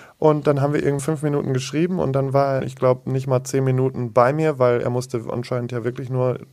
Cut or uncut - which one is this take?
cut